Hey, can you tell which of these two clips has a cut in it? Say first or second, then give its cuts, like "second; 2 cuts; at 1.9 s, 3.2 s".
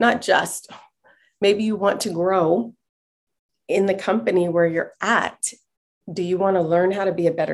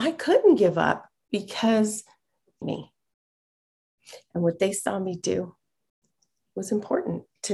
second; 1 cut; at 2.6 s